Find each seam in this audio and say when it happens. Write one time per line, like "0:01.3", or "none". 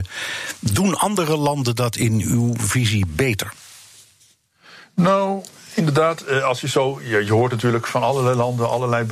none